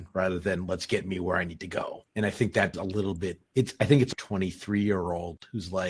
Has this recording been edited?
yes; 4 cuts; at 2.1 s, 2.7 s, 3.5 s, 4.1 s

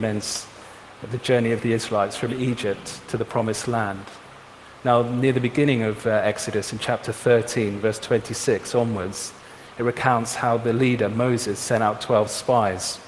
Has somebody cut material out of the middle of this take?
no; 0 cuts

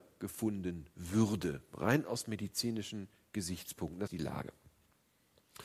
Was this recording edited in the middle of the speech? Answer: yes; 1 cut; at 4.1 s

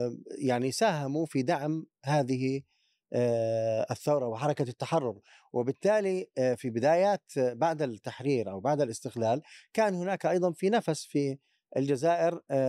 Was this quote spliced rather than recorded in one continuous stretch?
yes; 1 cut; at 1.9 s

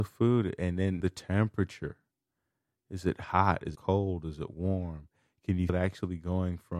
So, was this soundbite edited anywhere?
yes; 3 cuts; at 1.0 s, 3.8 s, 5.7 s

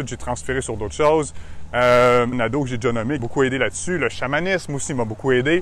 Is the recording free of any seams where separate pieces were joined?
no; 2 cuts; at 2.3 s, 3.2 s

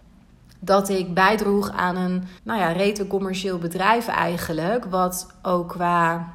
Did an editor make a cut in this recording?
yes; 1 cut; at 2.4 s

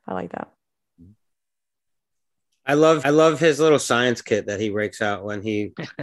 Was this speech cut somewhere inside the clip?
yes; 1 cut; at 3.0 s

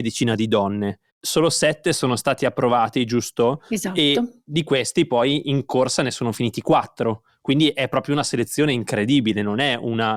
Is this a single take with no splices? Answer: no; 1 cut; at 1.1 s

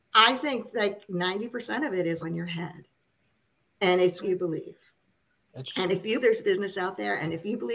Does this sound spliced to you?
yes; 3 cuts; at 2.2 s, 4.2 s, 6.2 s

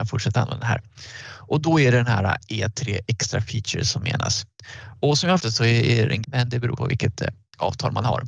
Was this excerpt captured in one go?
no; 3 cuts; at 5.4 s, 6.2 s, 6.8 s

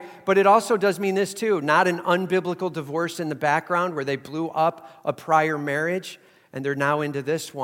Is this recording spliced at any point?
no; 0 cuts

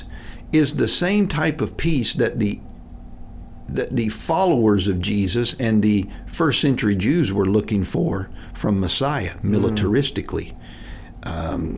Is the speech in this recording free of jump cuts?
yes; 0 cuts

